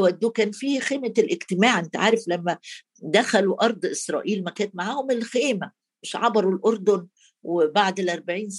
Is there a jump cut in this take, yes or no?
no